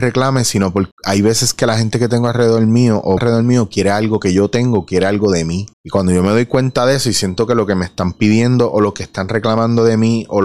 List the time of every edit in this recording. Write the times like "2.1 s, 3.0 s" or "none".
0.9 s, 3.2 s, 5.7 s